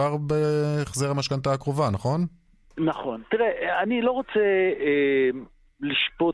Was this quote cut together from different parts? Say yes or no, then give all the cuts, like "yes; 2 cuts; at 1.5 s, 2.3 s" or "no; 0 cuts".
no; 0 cuts